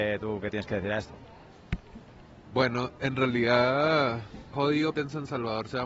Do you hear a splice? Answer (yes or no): yes